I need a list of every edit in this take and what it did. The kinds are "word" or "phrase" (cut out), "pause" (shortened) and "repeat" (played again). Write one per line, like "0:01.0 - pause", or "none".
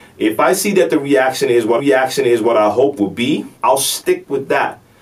0:01.8 - repeat
0:03.0 - word
0:03.5 - pause